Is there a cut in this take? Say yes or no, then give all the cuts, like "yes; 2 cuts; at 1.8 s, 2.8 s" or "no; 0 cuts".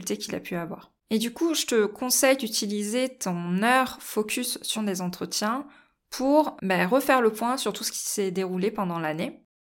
yes; 3 cuts; at 1.0 s, 4.7 s, 6.6 s